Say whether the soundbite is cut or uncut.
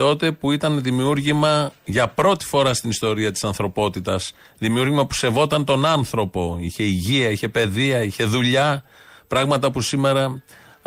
uncut